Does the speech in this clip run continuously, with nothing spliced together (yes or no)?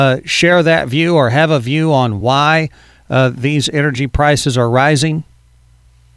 yes